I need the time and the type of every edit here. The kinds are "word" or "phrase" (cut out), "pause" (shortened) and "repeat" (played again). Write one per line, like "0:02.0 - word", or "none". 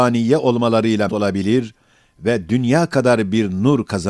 0:01.1 - word